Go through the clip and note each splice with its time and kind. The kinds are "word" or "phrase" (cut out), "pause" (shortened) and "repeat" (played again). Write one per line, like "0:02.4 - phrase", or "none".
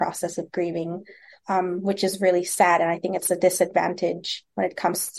none